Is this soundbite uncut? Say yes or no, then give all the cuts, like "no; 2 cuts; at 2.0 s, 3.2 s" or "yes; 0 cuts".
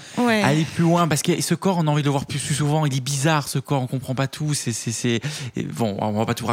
yes; 0 cuts